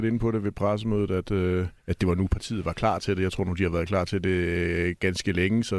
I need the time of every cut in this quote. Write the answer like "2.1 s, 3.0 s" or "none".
1.8 s